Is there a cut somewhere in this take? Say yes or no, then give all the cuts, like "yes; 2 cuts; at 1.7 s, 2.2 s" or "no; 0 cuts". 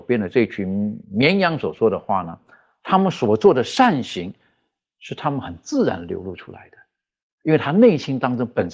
yes; 1 cut; at 1.0 s